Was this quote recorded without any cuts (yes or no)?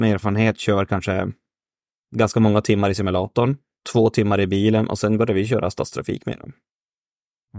yes